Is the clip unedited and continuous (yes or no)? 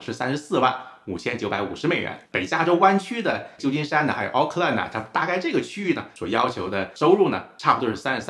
no